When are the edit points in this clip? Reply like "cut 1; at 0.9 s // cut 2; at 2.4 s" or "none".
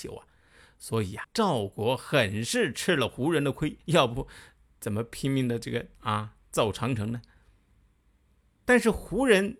cut 1; at 1.2 s // cut 2; at 3.8 s // cut 3; at 5.9 s